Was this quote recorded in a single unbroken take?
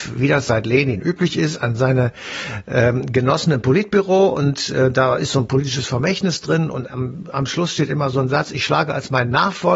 yes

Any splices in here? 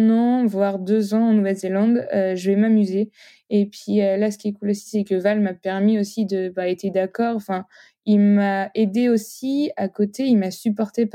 no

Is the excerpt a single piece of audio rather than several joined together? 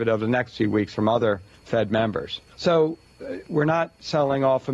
no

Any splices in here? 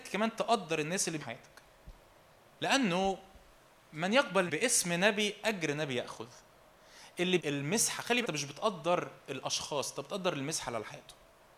yes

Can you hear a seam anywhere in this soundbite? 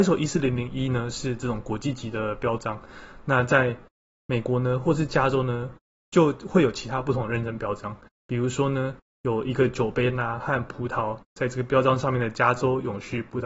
no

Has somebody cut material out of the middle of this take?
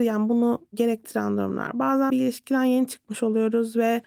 yes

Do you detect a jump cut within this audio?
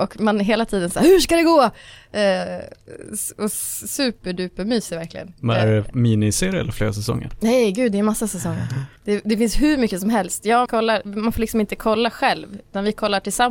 yes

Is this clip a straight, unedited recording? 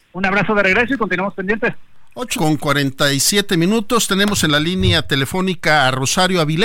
no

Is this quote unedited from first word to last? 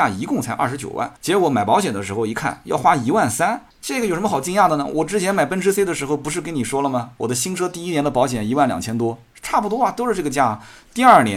no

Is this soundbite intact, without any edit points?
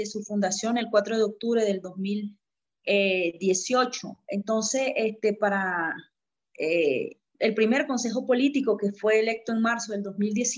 no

